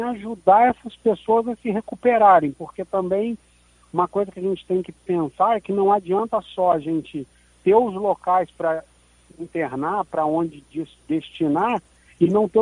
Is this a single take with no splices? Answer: yes; 0 cuts

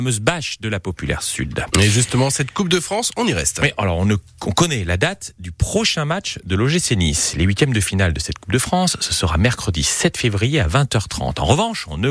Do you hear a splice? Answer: no; 0 cuts

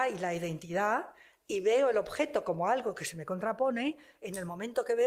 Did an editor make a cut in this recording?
no; 0 cuts

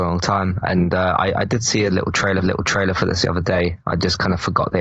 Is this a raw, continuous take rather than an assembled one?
no; 1 cut; at 2.4 s

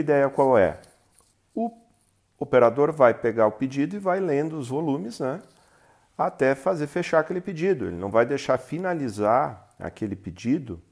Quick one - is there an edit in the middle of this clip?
no; 0 cuts

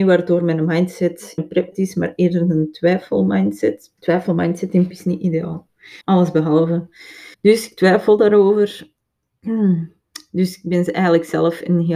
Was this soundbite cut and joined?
yes; 6 cuts; at 1.4 s, 1.7 s, 4.0 s, 4.9 s, 6.0 s, 7.3 s

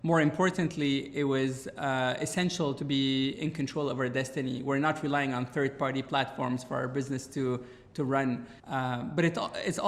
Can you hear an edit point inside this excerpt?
yes; 1 cut; at 8.6 s

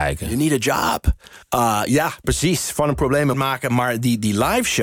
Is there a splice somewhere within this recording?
yes; 2 cuts; at 1.4 s, 3.3 s

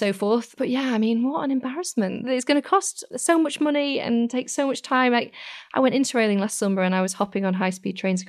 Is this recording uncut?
yes; 0 cuts

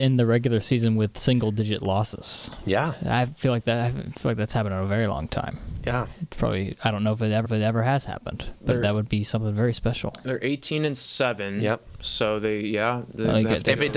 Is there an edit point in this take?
yes; 1 cut; at 7.4 s

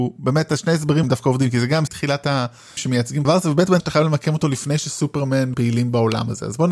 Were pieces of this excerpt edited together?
yes; 6 cuts; at 1.0 s, 1.9 s, 2.8 s, 3.2 s, 3.8 s, 5.5 s

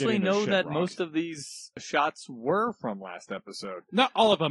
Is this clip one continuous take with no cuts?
yes; 0 cuts

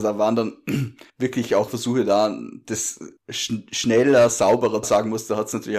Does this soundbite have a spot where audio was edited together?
yes; 4 cuts; at 1.1 s, 1.7 s, 3.2 s, 4.8 s

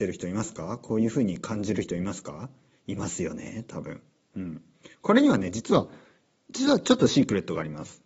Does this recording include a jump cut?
no; 0 cuts

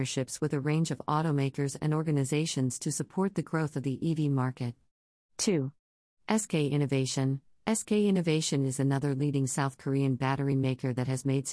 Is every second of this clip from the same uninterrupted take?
yes; 0 cuts

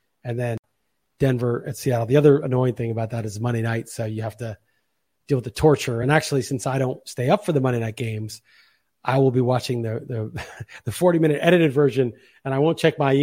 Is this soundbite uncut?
yes; 0 cuts

